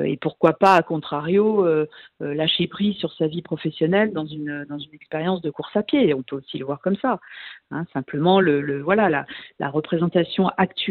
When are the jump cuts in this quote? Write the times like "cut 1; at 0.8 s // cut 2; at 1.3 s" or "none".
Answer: none